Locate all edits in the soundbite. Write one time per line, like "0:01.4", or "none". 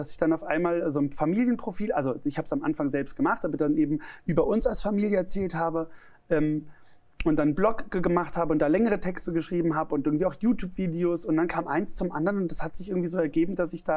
none

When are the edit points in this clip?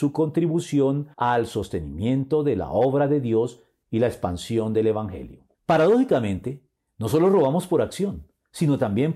0:01.1
0:05.5

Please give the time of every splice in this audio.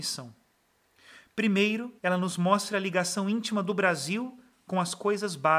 0:02.0

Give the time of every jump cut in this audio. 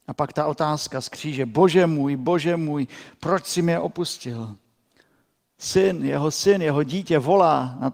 none

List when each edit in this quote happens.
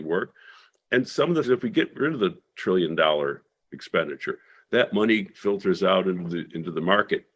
0:01.4

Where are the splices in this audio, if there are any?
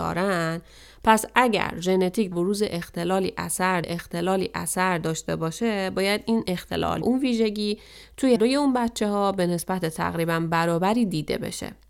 0:02.3
0:03.8
0:07.0
0:08.4

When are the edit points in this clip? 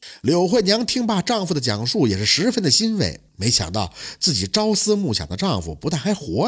0:03.3

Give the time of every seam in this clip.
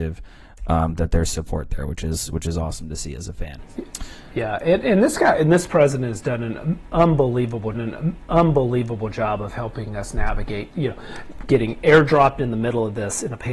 0:07.7

